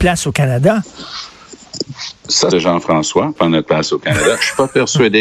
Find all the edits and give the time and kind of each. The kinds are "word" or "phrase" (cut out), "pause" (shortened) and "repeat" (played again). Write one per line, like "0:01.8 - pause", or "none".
0:02.5 - phrase
0:03.4 - phrase